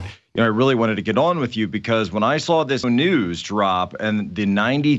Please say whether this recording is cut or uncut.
cut